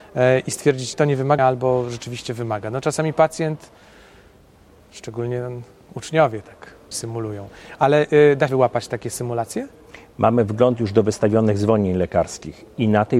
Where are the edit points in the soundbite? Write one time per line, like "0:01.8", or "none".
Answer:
0:00.9
0:01.4
0:06.9
0:08.5